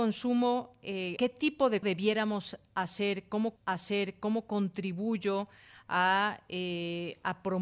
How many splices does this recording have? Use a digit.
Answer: 3